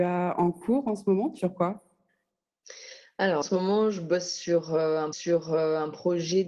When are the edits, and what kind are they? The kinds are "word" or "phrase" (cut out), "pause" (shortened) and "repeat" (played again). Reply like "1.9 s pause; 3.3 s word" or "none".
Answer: 1.4 s word; 3.4 s phrase; 5.1 s repeat